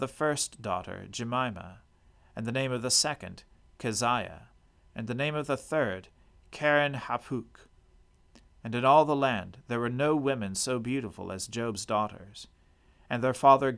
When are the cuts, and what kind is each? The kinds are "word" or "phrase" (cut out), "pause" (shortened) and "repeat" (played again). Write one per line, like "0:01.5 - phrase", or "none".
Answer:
none